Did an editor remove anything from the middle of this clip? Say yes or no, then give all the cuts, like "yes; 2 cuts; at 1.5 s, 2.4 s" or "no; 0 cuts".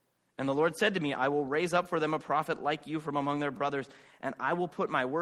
no; 0 cuts